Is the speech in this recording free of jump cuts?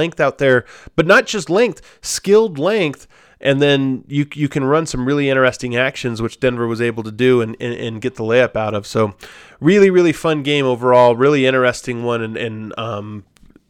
yes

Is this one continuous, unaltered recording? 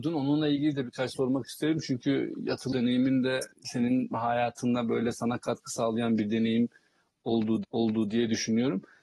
no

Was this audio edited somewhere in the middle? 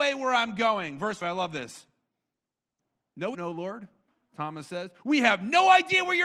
yes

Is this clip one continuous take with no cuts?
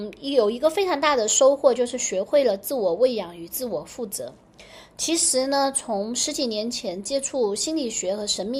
yes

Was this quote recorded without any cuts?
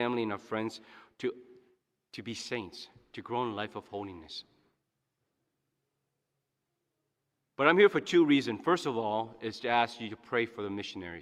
yes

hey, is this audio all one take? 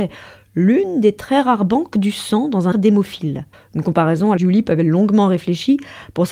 no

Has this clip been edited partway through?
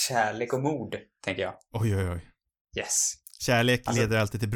no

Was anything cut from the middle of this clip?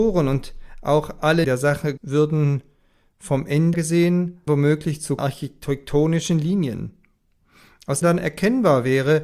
yes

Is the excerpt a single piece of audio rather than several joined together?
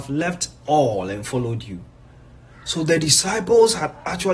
yes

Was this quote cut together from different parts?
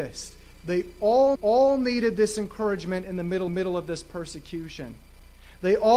yes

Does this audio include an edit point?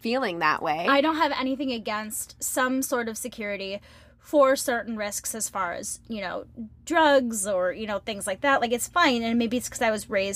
no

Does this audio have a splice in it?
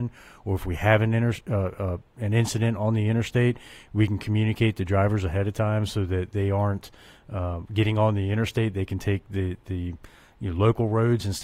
no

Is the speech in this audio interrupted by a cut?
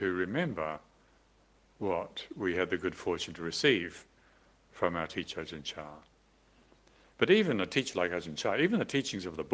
no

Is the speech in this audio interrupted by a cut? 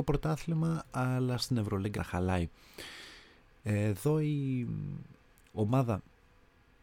yes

